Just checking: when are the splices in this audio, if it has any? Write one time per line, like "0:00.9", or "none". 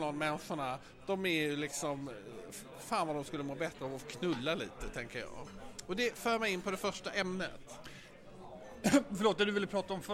none